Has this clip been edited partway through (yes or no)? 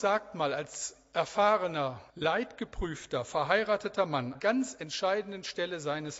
yes